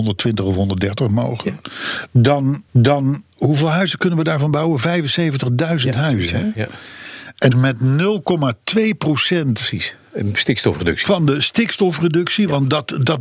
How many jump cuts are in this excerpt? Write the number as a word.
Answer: two